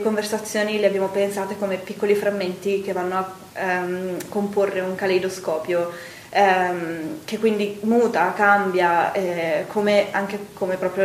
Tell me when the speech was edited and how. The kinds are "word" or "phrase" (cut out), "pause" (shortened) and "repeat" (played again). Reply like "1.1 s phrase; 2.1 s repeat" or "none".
none

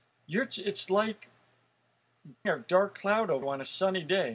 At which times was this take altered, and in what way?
2.4 s word; 3.4 s word

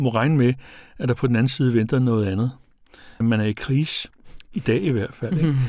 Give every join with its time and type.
3.2 s phrase

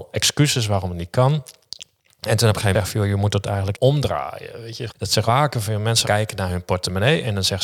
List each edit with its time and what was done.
2.7 s word; 3.7 s word; 4.9 s word; 5.3 s word; 6.0 s word

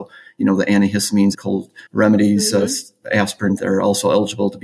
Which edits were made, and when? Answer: 1.3 s word; 1.9 s pause; 3.6 s phrase

